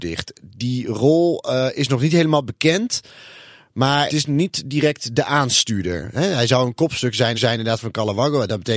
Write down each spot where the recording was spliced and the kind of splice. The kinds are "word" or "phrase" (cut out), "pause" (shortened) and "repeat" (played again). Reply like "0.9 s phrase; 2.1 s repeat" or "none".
4.1 s word; 7.3 s repeat